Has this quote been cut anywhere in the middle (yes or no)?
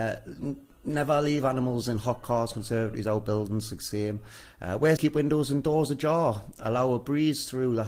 yes